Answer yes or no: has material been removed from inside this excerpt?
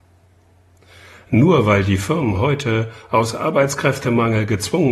no